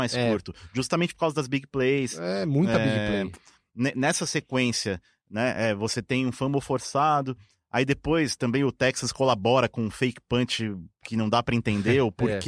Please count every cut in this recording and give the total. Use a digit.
0